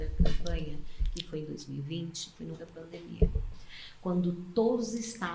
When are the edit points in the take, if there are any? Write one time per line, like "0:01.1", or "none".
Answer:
0:02.5